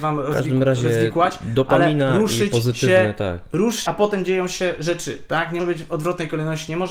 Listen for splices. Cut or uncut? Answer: cut